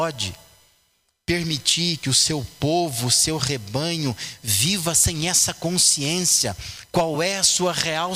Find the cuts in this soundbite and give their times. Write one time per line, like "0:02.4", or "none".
none

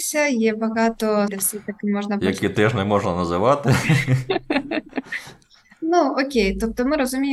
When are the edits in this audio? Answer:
0:01.3

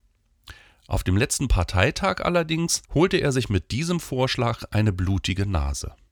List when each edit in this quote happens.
0:02.8

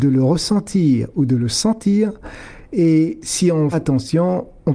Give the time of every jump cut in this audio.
0:03.7

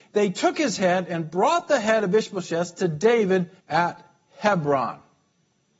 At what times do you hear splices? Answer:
0:03.6

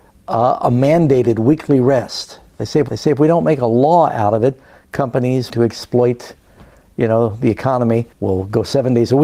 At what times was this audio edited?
0:02.9
0:05.5
0:08.1

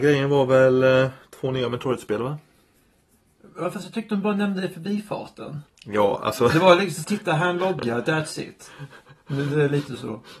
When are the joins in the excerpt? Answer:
0:05.7
0:07.0

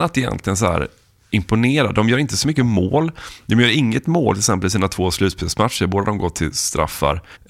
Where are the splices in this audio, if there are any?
none

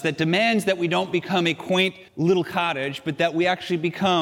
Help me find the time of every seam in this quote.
0:02.1

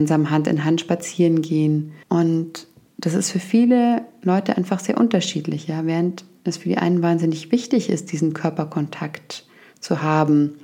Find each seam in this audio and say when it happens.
0:02.0

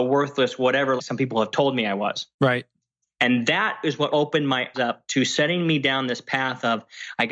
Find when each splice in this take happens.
0:01.0
0:02.3
0:04.1
0:04.7

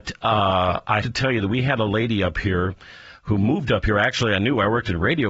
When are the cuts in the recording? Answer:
0:01.0

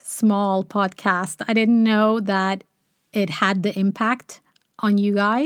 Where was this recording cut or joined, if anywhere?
none

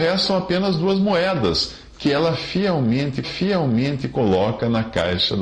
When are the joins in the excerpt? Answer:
0:03.2

